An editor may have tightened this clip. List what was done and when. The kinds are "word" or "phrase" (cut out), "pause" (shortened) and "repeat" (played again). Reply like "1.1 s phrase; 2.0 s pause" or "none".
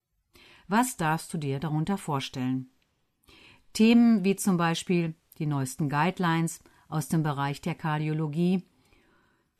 none

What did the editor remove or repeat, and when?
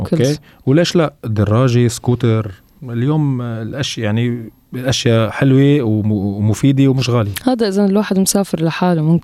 none

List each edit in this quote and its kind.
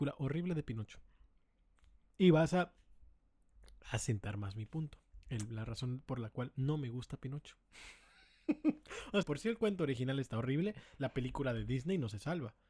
5.2 s pause; 9.2 s phrase

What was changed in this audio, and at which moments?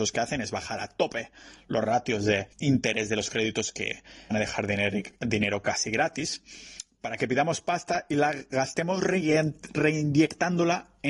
2.5 s pause; 4.3 s phrase

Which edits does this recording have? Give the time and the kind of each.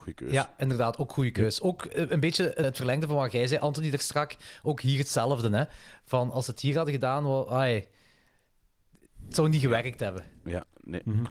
2.6 s word

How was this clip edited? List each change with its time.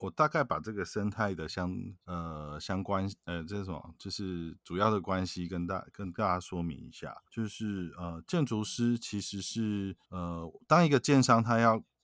2.0 s pause; 7.3 s pause; 10.0 s pause

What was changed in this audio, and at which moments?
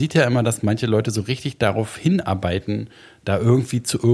none

